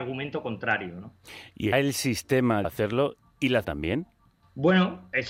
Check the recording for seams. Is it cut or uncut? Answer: cut